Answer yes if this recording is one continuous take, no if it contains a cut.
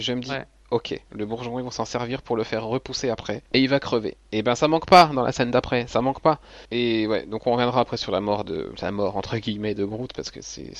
no